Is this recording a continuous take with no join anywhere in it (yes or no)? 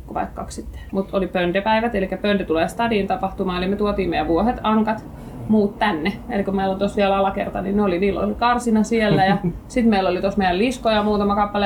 yes